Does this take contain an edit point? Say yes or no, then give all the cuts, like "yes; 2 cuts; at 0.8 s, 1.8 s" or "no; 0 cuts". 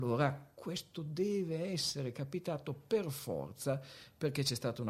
no; 0 cuts